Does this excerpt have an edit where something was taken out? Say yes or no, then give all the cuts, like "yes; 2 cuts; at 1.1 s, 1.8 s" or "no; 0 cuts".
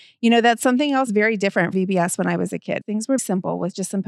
yes; 4 cuts; at 1.1 s, 1.7 s, 2.8 s, 3.2 s